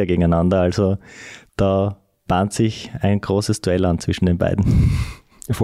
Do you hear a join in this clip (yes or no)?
no